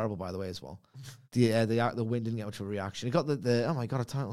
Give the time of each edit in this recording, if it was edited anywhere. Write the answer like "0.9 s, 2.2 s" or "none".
1.2 s